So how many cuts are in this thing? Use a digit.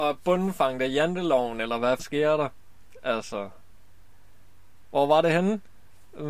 1